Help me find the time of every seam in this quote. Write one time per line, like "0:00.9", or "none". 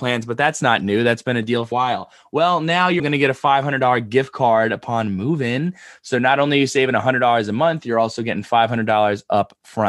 0:01.7
0:03.0